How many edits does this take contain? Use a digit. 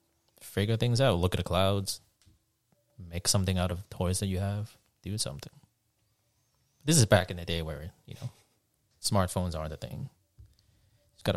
0